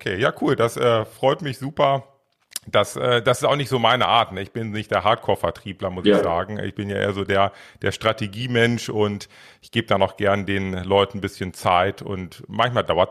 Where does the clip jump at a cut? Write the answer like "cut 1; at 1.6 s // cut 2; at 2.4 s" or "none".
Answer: none